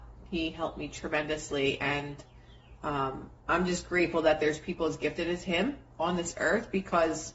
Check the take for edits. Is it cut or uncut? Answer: cut